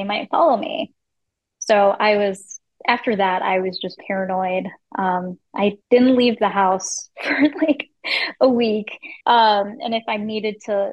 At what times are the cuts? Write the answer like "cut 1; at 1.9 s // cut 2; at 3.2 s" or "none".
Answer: cut 1; at 1.4 s // cut 2; at 4.0 s // cut 3; at 5.8 s // cut 4; at 9.2 s